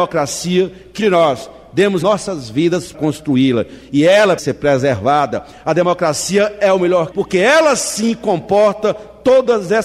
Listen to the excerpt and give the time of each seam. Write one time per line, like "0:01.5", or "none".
0:01.0
0:02.0
0:02.9
0:04.4
0:07.1